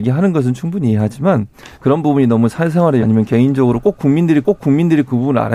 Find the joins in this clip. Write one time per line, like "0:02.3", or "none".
0:01.7
0:03.0
0:04.4